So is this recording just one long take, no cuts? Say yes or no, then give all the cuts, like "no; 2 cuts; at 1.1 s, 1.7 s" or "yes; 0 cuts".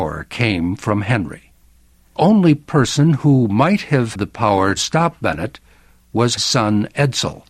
no; 4 cuts; at 2.2 s, 4.1 s, 4.8 s, 6.4 s